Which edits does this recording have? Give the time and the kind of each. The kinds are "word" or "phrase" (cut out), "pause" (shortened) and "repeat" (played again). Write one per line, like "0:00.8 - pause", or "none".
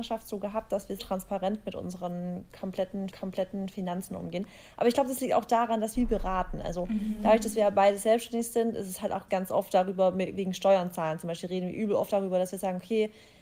0:01.0 - word
0:03.1 - repeat
0:06.0 - phrase
0:09.3 - word